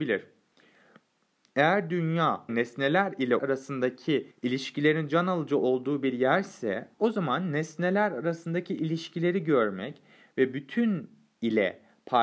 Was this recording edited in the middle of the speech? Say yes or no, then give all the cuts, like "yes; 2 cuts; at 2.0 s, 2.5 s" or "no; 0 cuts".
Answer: yes; 4 cuts; at 2.5 s, 3.4 s, 4.3 s, 6.9 s